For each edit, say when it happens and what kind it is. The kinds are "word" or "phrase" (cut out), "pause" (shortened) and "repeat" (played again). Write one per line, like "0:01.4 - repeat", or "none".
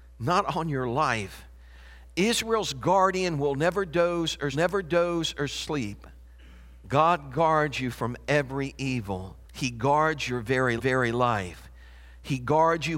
0:04.5 - repeat
0:09.5 - pause
0:10.8 - repeat